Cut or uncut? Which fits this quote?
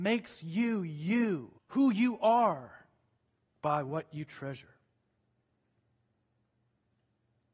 cut